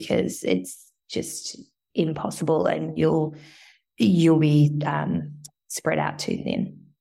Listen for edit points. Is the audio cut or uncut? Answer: uncut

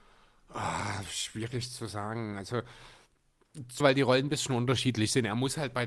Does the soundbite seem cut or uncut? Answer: cut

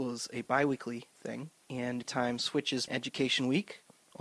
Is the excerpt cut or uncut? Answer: cut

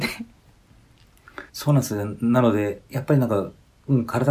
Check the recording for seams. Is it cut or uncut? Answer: cut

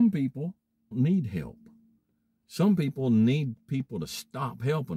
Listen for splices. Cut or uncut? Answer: cut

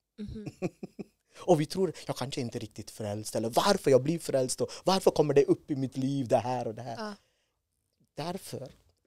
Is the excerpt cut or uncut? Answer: uncut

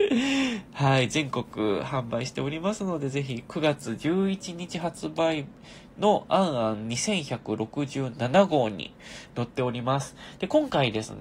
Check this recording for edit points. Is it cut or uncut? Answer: uncut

